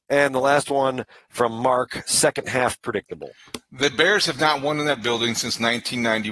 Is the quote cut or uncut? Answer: uncut